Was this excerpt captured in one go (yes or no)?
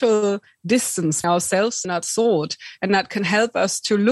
no